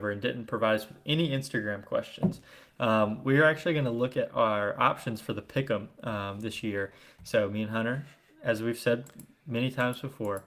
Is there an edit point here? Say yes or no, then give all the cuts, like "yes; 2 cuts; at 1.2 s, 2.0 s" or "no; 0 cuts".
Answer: no; 0 cuts